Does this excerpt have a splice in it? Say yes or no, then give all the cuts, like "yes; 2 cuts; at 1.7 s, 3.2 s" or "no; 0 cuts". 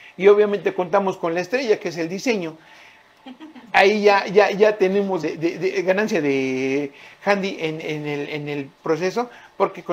yes; 1 cut; at 5.2 s